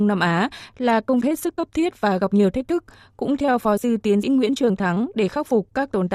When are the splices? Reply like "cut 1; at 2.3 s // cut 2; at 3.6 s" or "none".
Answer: cut 1; at 1.2 s // cut 2; at 3.8 s // cut 3; at 4.2 s